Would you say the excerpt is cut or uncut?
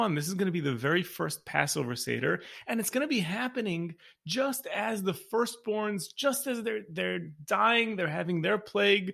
uncut